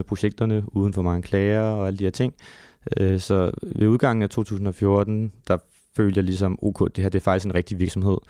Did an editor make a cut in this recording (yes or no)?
no